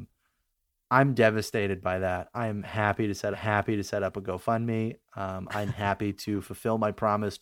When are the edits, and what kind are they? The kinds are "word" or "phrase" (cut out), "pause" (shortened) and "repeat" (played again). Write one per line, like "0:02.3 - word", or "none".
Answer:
0:03.3 - repeat